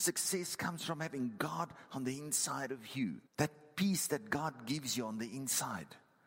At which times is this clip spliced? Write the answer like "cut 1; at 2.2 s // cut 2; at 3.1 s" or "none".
cut 1; at 3.3 s